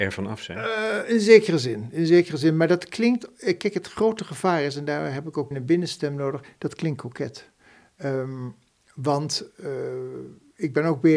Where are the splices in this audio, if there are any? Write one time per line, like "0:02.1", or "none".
0:05.5